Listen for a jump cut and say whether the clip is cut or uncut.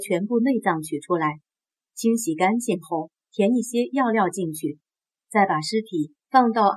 uncut